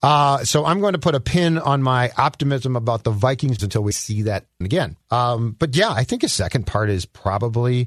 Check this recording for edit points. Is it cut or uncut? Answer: cut